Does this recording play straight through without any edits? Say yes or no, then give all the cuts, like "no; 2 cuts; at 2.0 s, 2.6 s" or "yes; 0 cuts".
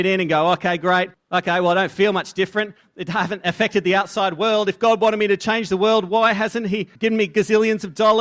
no; 2 cuts; at 1.1 s, 7.0 s